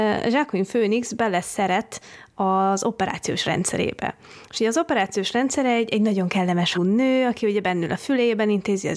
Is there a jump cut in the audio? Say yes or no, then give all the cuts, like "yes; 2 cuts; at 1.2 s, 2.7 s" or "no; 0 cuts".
yes; 1 cut; at 6.7 s